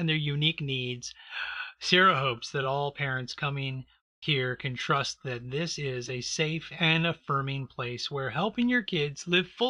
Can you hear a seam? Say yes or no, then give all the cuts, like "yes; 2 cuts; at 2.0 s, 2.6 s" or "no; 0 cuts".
no; 0 cuts